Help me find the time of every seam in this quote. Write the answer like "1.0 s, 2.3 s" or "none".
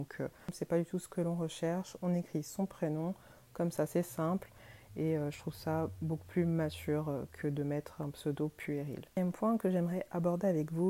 none